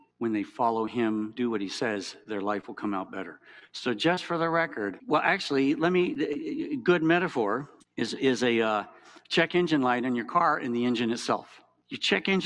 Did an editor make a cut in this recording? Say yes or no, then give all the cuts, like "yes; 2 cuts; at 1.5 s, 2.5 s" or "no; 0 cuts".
yes; 1 cut; at 1.4 s